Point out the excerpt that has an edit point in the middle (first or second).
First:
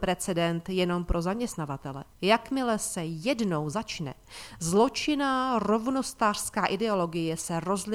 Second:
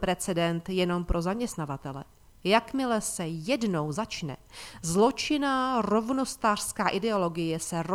first